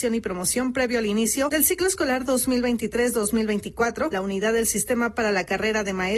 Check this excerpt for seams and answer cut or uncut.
uncut